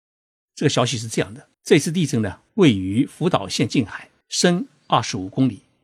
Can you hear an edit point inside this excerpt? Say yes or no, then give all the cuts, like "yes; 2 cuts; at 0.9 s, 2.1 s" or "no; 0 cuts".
yes; 3 cuts; at 1.5 s, 2.5 s, 4.2 s